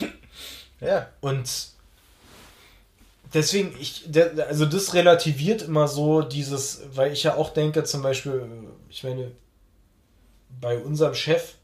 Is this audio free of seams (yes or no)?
yes